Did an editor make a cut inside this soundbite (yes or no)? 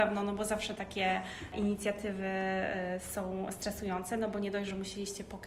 no